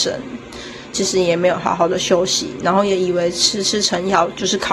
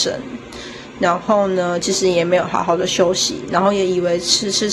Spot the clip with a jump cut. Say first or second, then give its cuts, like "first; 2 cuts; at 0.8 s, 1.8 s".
first; 1 cut; at 0.9 s